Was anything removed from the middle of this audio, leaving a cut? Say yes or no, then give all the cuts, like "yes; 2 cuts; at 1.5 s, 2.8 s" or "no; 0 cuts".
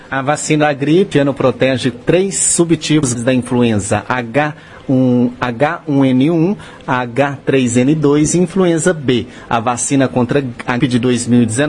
yes; 4 cuts; at 1.1 s, 1.9 s, 3.1 s, 10.8 s